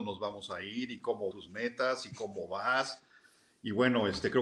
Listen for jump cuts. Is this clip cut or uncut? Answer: cut